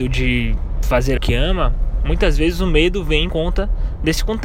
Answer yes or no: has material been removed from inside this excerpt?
yes